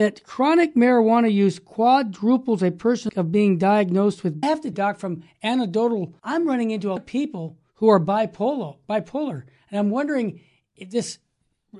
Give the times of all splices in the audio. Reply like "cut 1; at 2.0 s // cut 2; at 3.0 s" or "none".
cut 1; at 3.1 s // cut 2; at 4.4 s // cut 3; at 4.7 s // cut 4; at 6.2 s // cut 5; at 7.0 s // cut 6; at 7.7 s